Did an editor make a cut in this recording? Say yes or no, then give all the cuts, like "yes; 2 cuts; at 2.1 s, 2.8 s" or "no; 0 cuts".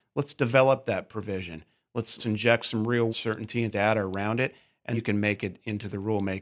yes; 4 cuts; at 2.2 s, 3.1 s, 3.7 s, 4.9 s